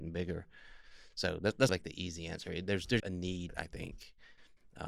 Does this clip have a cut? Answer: yes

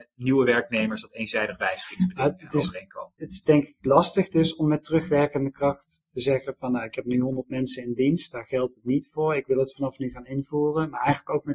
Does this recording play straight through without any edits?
yes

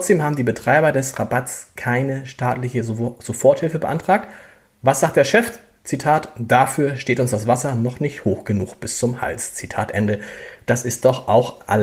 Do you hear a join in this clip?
no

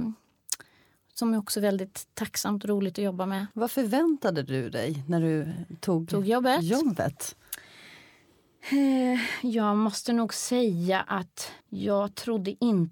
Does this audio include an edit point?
yes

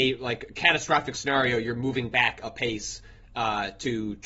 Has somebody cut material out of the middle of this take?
no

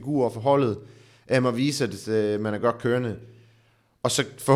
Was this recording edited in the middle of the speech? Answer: no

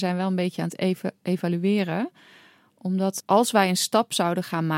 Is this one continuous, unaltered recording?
no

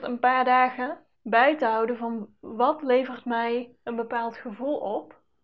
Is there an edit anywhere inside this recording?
yes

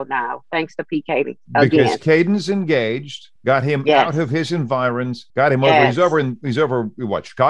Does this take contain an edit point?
yes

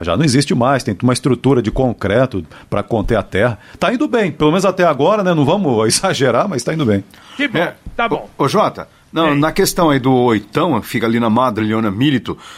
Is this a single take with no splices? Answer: yes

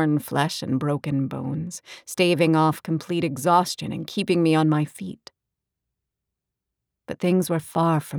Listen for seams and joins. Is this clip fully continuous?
yes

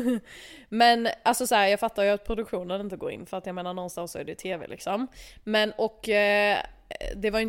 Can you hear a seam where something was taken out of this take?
no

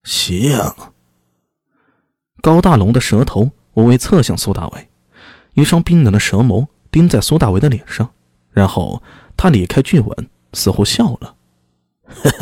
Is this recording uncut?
yes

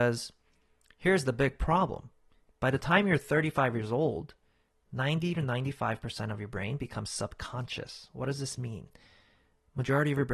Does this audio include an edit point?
no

